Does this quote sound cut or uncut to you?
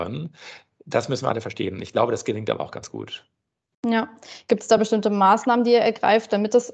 uncut